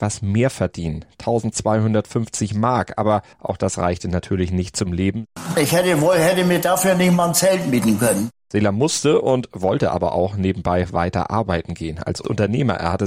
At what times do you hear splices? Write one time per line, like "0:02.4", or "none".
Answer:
0:03.3